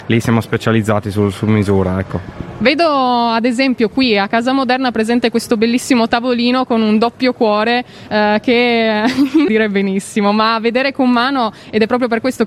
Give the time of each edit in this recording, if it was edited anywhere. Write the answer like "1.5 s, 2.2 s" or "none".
1.3 s, 9.5 s